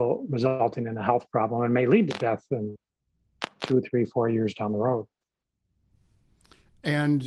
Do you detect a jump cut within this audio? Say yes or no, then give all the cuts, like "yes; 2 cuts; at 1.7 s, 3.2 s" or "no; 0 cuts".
no; 0 cuts